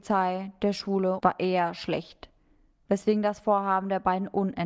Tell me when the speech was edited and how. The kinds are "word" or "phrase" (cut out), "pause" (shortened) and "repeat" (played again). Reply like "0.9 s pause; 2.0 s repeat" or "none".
1.2 s phrase